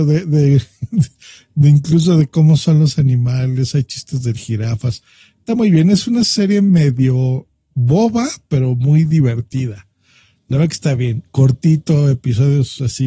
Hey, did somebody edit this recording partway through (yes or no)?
no